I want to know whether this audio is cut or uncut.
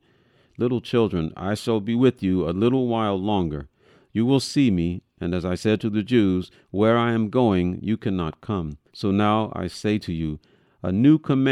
cut